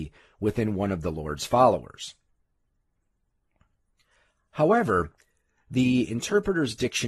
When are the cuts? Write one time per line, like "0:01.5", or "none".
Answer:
none